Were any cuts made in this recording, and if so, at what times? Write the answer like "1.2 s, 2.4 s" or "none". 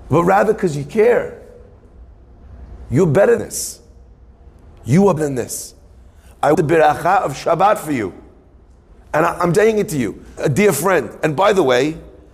3.4 s, 5.2 s, 6.5 s, 9.5 s, 10.4 s